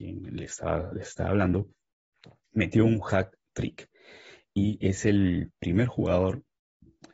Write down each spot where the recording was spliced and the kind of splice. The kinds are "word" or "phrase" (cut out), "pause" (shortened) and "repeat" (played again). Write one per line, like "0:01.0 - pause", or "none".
none